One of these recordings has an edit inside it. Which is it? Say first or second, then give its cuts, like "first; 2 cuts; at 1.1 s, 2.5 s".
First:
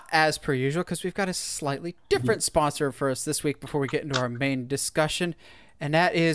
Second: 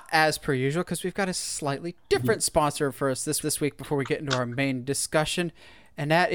second; 1 cut; at 3.4 s